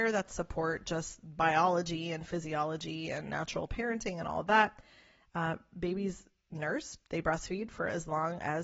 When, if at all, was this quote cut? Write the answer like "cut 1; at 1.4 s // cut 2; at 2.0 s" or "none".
none